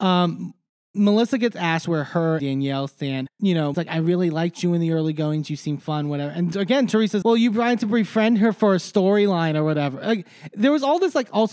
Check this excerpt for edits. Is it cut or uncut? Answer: cut